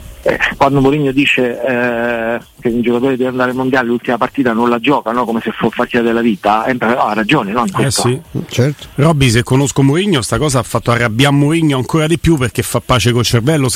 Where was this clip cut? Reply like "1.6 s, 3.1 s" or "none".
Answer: 5.8 s